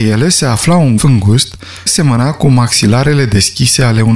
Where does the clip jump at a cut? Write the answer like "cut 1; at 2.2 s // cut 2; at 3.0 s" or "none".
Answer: cut 1; at 1.0 s // cut 2; at 1.9 s